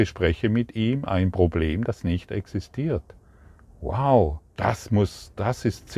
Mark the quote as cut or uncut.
cut